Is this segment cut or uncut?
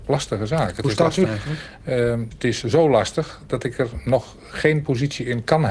cut